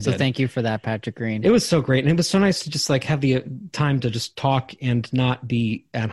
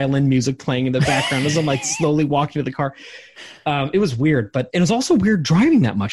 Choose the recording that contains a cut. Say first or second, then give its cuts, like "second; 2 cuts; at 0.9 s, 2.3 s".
second; 1 cut; at 4.7 s